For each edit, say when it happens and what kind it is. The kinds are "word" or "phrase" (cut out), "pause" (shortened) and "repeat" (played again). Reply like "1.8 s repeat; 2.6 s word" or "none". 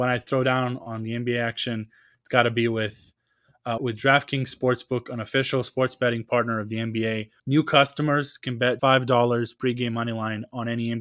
3.8 s word; 7.4 s pause; 8.8 s word